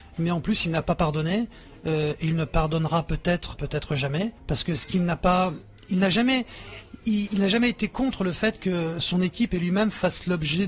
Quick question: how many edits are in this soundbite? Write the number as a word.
two